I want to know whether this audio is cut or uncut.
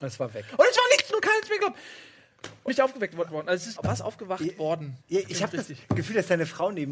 cut